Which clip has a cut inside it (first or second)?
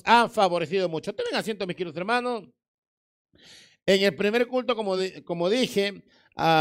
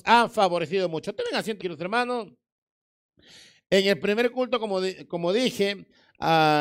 second